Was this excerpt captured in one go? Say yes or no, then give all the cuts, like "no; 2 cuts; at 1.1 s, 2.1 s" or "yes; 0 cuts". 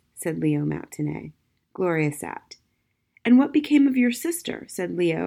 yes; 0 cuts